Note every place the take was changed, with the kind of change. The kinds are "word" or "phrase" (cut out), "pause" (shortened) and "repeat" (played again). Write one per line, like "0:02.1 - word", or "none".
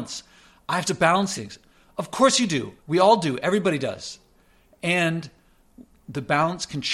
0:01.4 - word
0:02.8 - pause

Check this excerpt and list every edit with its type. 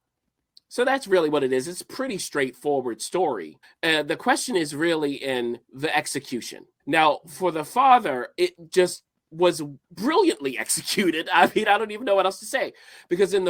0:03.6 - pause
0:05.6 - pause
0:06.8 - pause
0:09.8 - pause

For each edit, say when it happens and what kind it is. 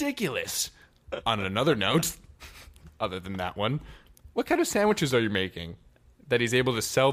none

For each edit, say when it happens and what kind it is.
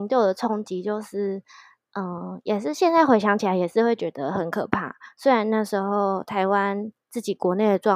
none

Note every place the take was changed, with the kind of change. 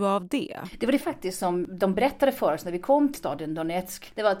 0:01.0 - word
0:03.1 - word

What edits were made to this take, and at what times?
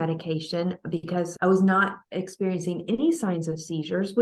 none

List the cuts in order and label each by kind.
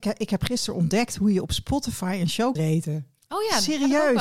0:02.6 - word

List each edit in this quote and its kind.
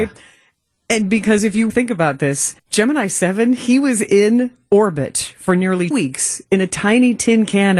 0:01.7 - word
0:02.6 - pause
0:05.9 - word

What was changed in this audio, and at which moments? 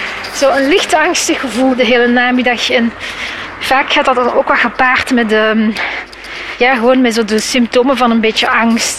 0:01.7 - word

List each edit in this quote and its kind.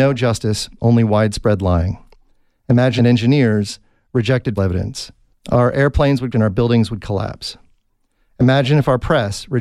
0:03.0 - phrase
0:04.6 - word
0:05.3 - pause
0:06.3 - word

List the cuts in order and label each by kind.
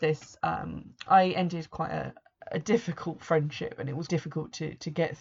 0:04.1 - word

